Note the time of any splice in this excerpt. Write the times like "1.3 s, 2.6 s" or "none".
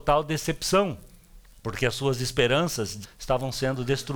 1.5 s, 3.0 s

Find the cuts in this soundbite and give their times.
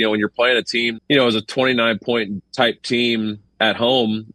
1.0 s, 2.4 s

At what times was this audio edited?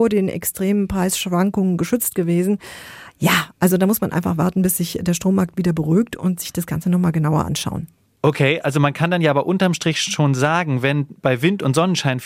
8.0 s

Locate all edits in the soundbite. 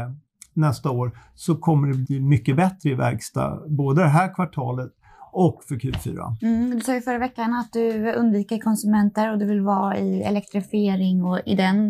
2.1 s

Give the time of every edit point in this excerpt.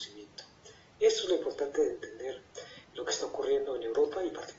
2.8 s

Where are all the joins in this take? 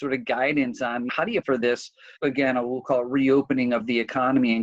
1.1 s, 1.4 s, 2.2 s

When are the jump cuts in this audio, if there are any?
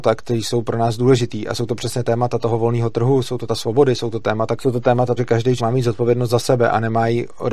3.5 s, 4.6 s, 5.2 s, 5.6 s

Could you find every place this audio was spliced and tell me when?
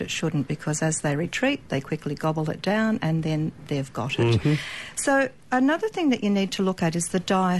5.4 s

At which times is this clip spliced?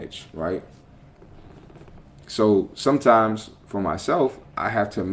none

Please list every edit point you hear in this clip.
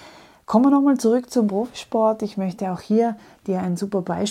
none

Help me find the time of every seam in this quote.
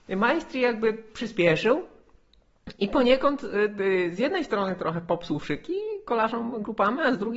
none

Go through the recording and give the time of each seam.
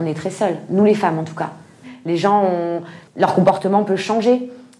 3.1 s

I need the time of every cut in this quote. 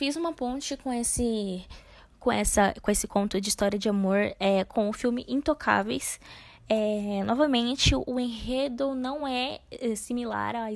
none

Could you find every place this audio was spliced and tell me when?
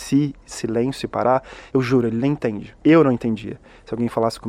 1.7 s, 2.8 s

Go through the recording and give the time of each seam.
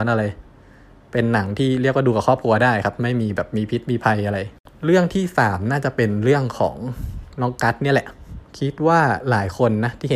8.5 s

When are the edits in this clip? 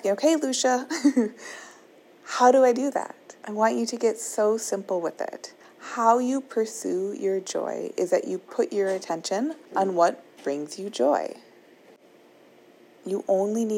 3.4 s, 5.6 s, 9.6 s

